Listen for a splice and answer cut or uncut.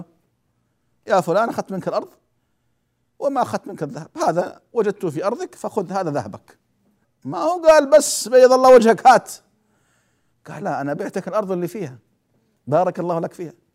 cut